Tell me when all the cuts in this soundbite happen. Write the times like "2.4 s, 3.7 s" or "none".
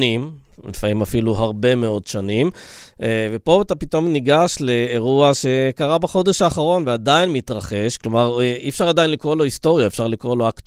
none